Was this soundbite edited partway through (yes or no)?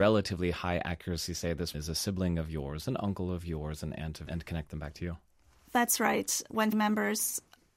yes